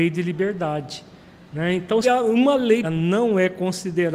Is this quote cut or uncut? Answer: cut